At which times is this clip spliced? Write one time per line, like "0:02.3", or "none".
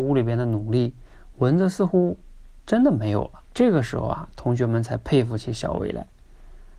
0:03.4